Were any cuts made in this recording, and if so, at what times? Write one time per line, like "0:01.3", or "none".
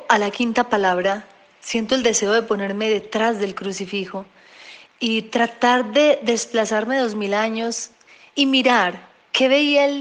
0:08.3